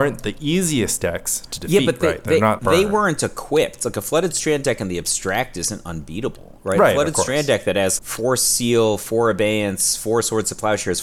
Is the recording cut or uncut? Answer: cut